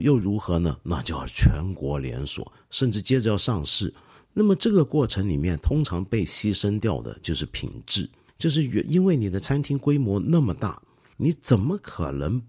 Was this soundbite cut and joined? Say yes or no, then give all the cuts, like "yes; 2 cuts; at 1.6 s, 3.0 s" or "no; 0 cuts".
no; 0 cuts